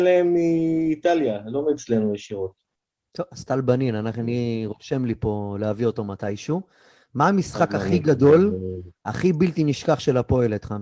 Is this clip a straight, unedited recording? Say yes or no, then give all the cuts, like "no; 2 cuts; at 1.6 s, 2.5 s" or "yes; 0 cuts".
yes; 0 cuts